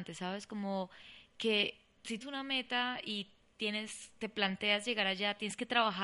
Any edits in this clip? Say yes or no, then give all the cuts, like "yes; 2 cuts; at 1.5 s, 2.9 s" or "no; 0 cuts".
yes; 1 cut; at 2.2 s